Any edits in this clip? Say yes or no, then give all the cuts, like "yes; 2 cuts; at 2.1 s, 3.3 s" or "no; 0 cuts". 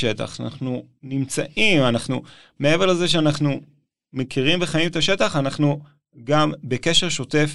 no; 0 cuts